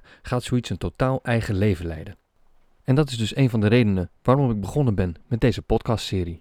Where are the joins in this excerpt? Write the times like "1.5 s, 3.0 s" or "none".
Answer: none